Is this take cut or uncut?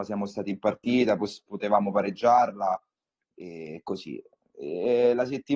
uncut